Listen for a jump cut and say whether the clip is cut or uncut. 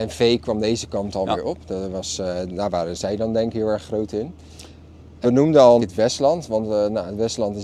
cut